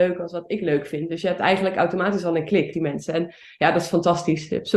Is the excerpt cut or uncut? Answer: cut